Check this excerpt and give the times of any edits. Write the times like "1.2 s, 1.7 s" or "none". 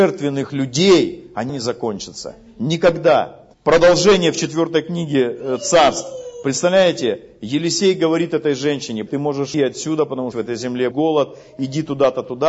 1.5 s, 3.5 s, 9.1 s, 9.5 s, 10.3 s, 10.9 s